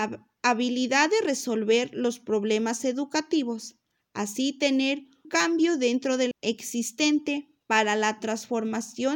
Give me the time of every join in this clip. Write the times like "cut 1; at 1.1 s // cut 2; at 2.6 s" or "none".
cut 1; at 5.2 s // cut 2; at 6.3 s